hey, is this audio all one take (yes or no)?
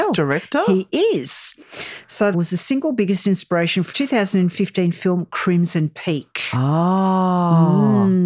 no